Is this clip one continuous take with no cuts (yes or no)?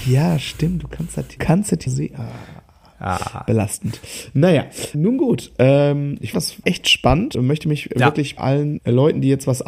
no